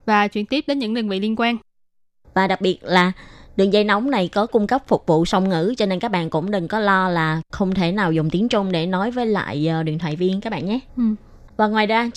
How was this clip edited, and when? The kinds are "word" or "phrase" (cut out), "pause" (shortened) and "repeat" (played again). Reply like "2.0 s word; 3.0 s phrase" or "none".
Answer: 10.9 s pause